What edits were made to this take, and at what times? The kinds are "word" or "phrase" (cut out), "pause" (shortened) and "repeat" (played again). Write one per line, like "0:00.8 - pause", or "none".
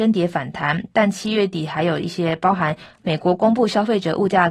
none